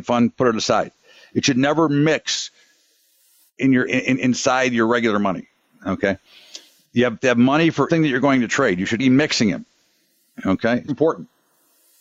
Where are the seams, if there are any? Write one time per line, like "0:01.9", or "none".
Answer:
0:03.9
0:07.9
0:09.0
0:10.9